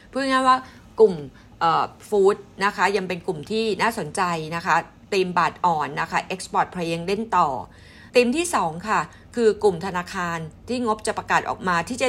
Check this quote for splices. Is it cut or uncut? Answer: cut